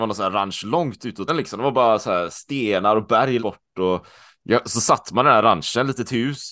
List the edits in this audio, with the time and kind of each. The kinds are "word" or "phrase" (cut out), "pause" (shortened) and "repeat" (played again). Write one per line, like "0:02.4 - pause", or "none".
0:01.3 - phrase
0:03.4 - word

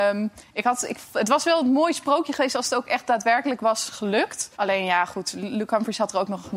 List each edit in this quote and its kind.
0:04.5 - pause

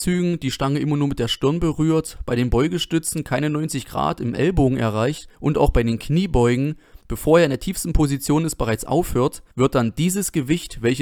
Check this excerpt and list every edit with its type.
0:05.3 - pause
0:07.0 - pause
0:09.5 - pause

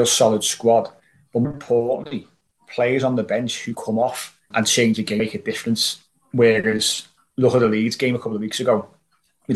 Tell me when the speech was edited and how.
0:01.4 - word
0:03.7 - word
0:04.5 - word
0:05.2 - word

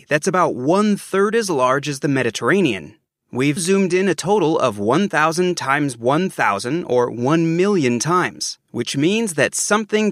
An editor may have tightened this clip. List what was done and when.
0:03.6 - word

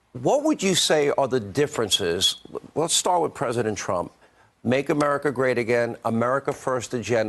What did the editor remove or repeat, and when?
none

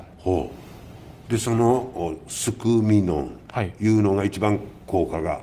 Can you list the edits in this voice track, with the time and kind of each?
none

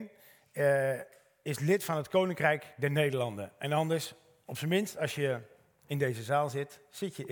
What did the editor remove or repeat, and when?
none

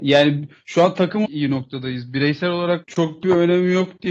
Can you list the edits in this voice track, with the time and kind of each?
0:01.3 - word
0:02.8 - word

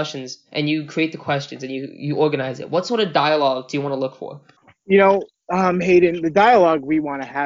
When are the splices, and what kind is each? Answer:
0:04.6 - pause

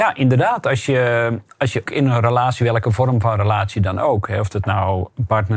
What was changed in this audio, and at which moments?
0:01.9 - word

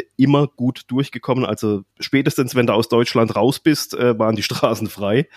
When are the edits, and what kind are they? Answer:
0:01.9 - pause

